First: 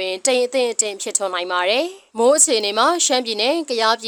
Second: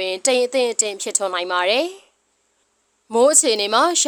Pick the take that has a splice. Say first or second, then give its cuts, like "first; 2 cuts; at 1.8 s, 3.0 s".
first; 1 cut; at 2.1 s